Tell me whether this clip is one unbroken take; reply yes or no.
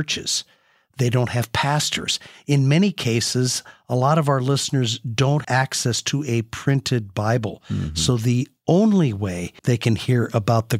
no